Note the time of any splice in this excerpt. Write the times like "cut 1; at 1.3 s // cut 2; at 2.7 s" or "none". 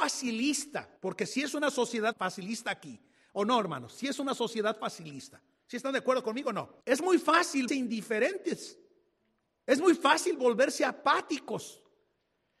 cut 1; at 1.0 s // cut 2; at 2.1 s // cut 3; at 6.8 s // cut 4; at 7.7 s // cut 5; at 9.5 s